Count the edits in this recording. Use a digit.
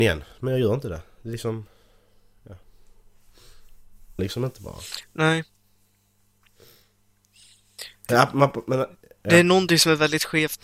2